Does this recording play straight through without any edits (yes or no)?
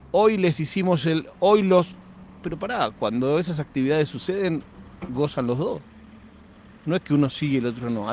yes